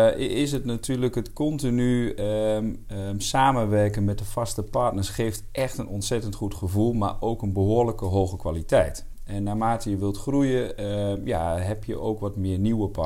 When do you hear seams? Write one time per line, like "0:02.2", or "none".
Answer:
none